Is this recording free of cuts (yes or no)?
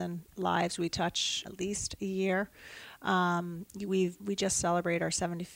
no